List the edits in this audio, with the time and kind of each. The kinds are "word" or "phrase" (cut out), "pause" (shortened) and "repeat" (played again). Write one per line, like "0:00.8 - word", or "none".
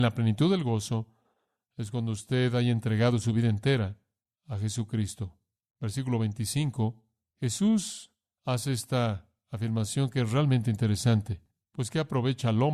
none